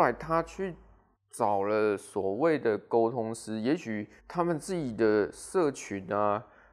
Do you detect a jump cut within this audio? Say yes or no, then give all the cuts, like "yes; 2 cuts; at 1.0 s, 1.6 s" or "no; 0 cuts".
yes; 2 cuts; at 1.1 s, 4.2 s